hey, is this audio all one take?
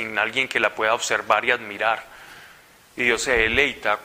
yes; 0 cuts

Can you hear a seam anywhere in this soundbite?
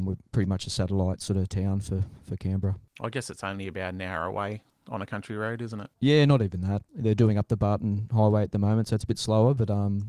yes; 1 cut; at 5.9 s

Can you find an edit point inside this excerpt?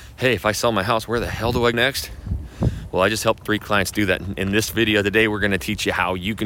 yes; 1 cut; at 1.7 s

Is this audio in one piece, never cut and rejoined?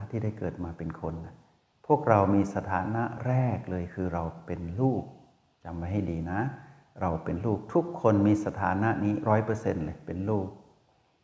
yes; 0 cuts

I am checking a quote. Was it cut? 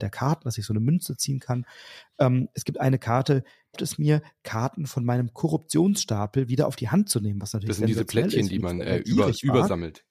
yes; 1 cut; at 3.7 s

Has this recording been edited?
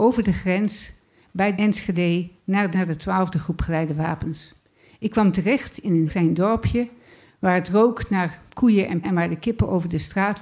yes; 3 cuts; at 2.7 s, 6.1 s, 9.0 s

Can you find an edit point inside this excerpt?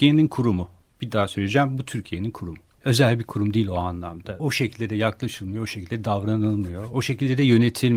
no; 0 cuts

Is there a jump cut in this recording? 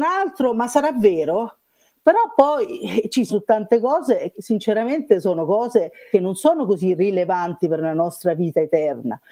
yes; 3 cuts; at 3.3 s, 4.3 s, 6.1 s

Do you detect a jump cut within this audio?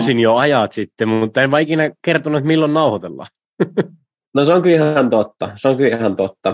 no; 0 cuts

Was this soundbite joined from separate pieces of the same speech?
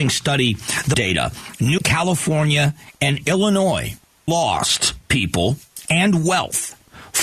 yes; 3 cuts; at 0.9 s, 1.8 s, 4.3 s

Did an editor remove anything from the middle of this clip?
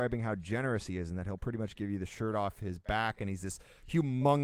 no; 0 cuts

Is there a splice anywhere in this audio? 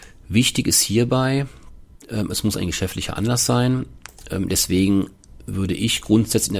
no; 0 cuts

